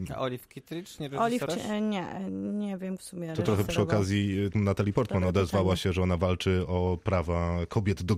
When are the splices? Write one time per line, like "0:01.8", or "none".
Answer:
0:01.5
0:03.0
0:04.5